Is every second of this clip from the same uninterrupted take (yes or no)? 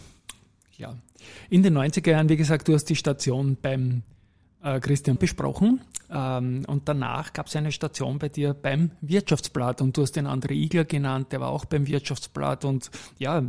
no